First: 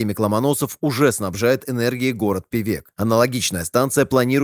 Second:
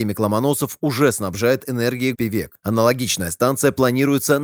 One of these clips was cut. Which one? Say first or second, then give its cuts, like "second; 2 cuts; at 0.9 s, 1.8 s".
second; 1 cut; at 2.1 s